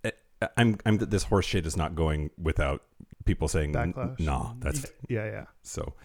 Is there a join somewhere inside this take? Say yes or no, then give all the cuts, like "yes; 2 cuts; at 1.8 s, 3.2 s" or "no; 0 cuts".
yes; 3 cuts; at 1.0 s, 3.1 s, 4.8 s